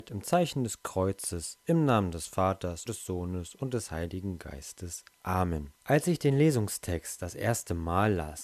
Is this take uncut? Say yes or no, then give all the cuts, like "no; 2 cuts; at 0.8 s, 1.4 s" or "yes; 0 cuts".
no; 2 cuts; at 2.9 s, 5.8 s